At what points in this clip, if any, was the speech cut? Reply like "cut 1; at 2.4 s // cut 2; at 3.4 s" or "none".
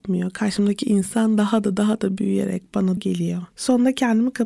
cut 1; at 3.0 s